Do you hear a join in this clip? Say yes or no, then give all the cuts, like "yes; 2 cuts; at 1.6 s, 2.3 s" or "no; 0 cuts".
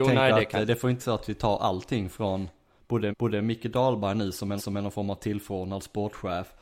yes; 3 cuts; at 1.0 s, 3.1 s, 4.6 s